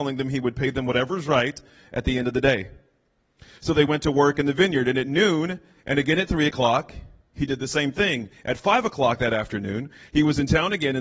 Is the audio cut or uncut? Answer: uncut